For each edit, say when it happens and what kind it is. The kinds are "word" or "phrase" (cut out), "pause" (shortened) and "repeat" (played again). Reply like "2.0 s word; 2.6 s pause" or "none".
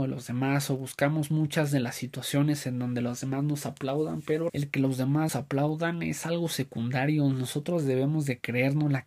4.5 s word; 5.3 s word